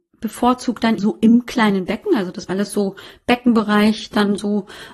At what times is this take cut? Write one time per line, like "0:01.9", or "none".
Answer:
0:01.0
0:02.5